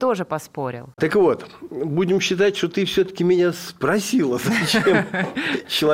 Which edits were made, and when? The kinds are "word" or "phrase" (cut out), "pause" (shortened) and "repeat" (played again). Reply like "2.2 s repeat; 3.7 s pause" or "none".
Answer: 0.9 s pause